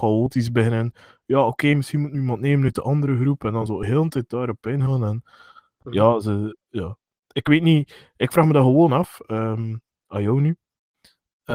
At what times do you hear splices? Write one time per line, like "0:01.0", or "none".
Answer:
none